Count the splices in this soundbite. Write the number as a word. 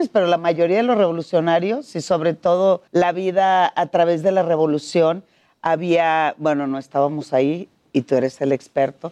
one